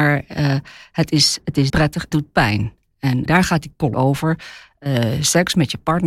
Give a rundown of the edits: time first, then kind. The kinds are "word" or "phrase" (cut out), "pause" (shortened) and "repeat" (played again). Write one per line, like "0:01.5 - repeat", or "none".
0:01.7 - word
0:02.1 - word
0:03.3 - word
0:03.9 - word